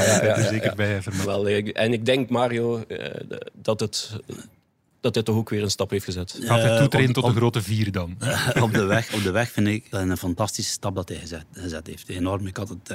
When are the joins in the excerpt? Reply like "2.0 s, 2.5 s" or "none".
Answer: 1.2 s, 9.9 s